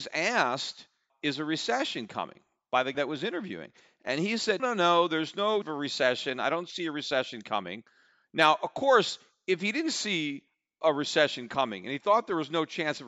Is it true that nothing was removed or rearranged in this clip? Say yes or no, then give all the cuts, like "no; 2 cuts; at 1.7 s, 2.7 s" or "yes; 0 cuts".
no; 4 cuts; at 1.1 s, 2.9 s, 4.6 s, 5.6 s